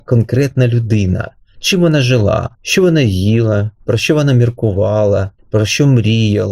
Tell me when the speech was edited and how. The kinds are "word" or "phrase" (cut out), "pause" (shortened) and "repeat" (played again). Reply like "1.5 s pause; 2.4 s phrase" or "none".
2.5 s pause; 3.8 s pause; 5.4 s pause